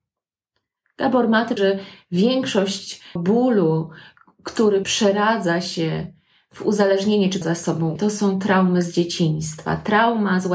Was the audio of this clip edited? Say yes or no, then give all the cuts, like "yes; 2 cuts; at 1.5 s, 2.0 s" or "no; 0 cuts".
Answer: yes; 5 cuts; at 1.6 s, 3.2 s, 4.8 s, 7.4 s, 8.0 s